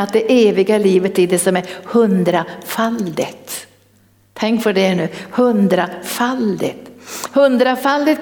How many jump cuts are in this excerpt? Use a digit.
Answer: 1